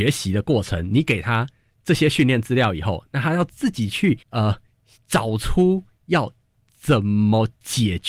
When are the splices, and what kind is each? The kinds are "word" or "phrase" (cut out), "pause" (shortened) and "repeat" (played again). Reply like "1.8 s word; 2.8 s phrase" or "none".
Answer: 4.2 s pause